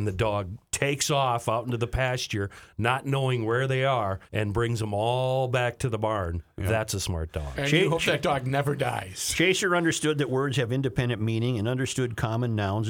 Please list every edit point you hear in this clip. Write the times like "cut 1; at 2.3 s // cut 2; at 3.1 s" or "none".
cut 1; at 4.3 s